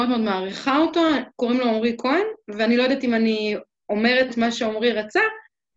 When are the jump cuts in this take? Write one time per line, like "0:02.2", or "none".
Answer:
0:01.3
0:04.3